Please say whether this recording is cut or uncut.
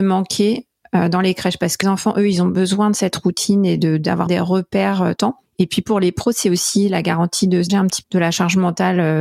cut